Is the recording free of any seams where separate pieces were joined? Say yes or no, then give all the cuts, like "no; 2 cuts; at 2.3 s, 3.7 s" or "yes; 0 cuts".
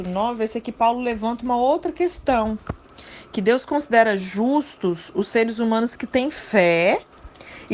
yes; 0 cuts